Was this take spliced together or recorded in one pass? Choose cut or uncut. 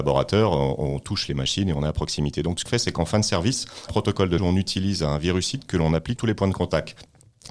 cut